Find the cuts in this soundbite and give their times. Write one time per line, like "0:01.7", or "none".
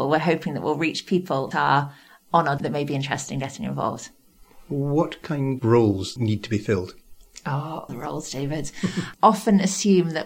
0:01.5
0:02.6
0:05.6
0:06.2
0:07.9
0:09.1